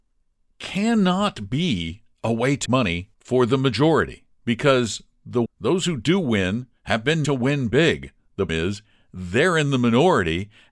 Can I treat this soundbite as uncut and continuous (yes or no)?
no